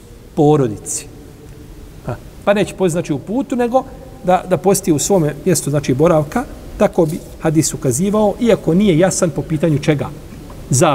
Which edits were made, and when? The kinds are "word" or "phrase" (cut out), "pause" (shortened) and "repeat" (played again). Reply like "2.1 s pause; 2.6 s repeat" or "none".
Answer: none